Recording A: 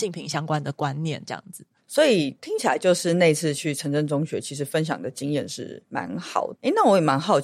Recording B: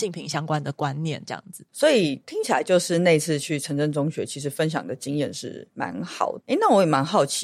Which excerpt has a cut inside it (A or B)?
B